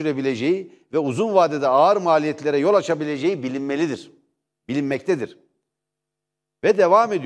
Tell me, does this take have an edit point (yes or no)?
no